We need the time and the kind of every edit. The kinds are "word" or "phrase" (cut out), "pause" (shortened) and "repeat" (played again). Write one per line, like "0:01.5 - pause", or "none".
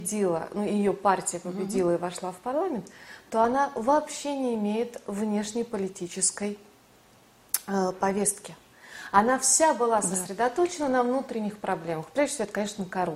none

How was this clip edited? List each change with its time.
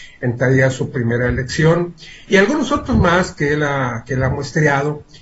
none

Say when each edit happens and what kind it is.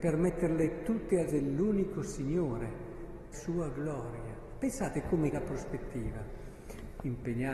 0:01.3 - word
0:03.3 - word
0:05.3 - word

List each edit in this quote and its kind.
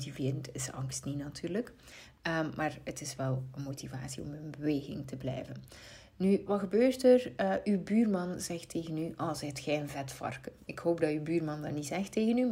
0:06.5 - word

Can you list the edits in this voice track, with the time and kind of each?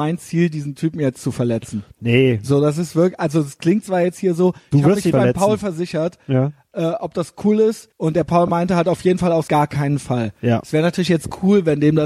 0:05.1 - word
0:07.9 - pause
0:09.5 - phrase

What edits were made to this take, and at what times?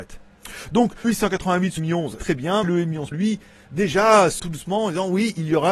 0:01.0 - word
0:01.8 - word
0:02.2 - word
0:02.6 - word
0:03.1 - word
0:04.4 - word

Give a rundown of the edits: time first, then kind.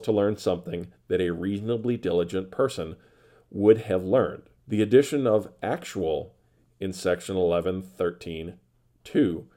0:04.6 - pause

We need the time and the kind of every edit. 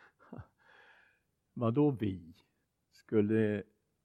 none

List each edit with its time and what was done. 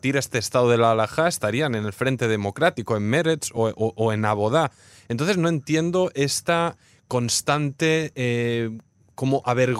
none

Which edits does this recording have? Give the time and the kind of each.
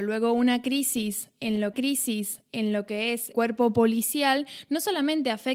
0:01.7 - repeat
0:03.3 - word

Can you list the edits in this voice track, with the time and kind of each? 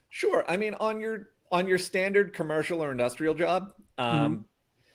none

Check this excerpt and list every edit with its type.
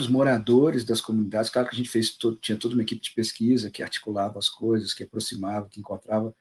none

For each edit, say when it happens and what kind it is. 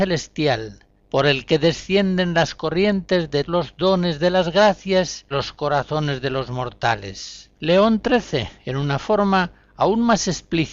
0:01.0 - pause
0:03.5 - word
0:05.3 - word
0:07.5 - pause

